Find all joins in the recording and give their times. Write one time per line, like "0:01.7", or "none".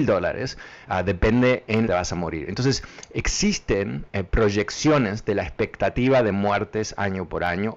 0:01.9
0:04.1